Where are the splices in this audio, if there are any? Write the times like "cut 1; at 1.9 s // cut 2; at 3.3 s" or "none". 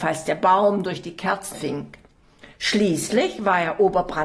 cut 1; at 1.5 s